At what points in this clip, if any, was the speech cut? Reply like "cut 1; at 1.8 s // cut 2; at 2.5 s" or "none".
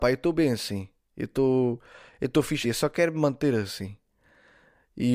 cut 1; at 2.6 s